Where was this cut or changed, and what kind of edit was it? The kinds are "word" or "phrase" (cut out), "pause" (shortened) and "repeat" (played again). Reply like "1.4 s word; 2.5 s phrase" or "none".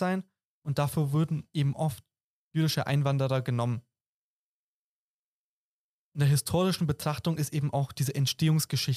none